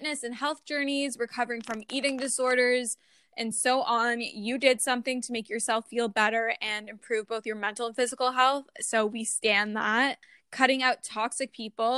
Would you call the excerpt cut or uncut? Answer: uncut